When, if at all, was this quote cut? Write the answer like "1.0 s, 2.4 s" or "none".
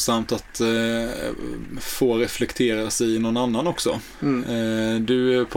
none